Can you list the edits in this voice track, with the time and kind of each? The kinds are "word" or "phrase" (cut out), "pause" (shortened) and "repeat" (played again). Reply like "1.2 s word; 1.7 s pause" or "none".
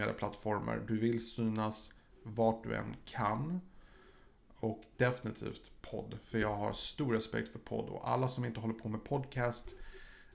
none